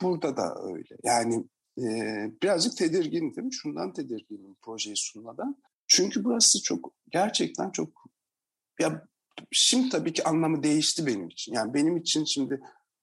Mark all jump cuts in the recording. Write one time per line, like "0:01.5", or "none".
0:05.7